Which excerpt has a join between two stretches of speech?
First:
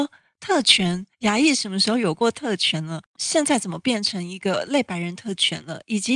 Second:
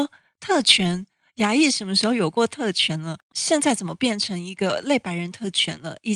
first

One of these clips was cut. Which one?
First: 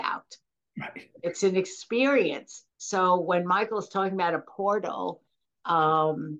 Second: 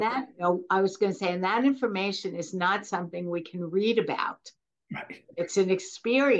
first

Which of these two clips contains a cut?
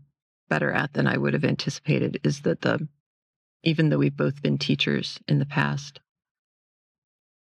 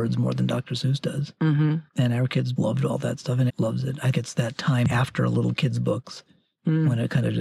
second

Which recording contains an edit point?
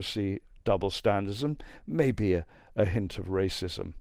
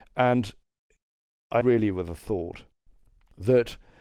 second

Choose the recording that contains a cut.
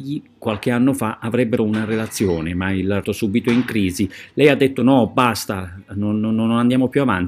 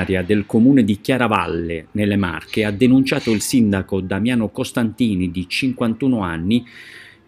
first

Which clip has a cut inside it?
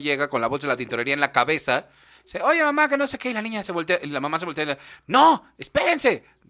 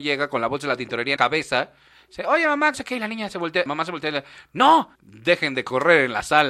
second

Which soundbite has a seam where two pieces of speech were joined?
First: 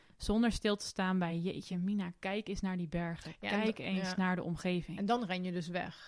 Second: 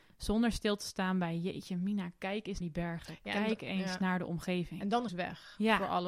second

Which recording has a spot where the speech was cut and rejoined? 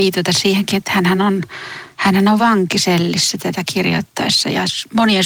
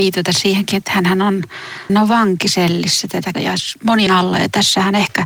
second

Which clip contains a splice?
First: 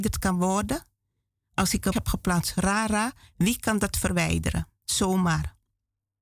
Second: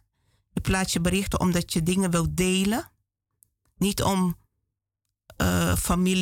first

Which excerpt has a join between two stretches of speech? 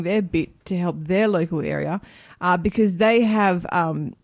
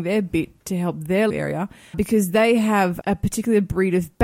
second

